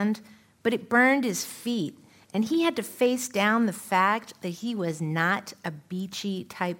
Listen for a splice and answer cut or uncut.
uncut